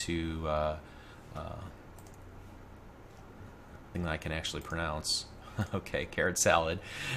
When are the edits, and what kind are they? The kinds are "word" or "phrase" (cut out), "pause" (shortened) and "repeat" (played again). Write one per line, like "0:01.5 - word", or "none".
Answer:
0:03.9 - word